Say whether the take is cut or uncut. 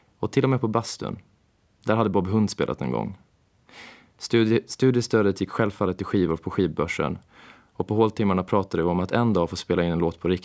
uncut